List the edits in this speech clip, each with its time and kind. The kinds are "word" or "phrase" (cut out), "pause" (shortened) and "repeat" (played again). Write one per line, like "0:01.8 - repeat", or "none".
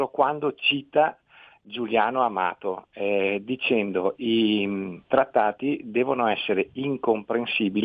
none